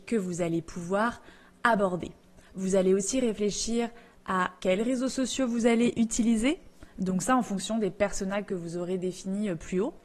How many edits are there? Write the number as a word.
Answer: one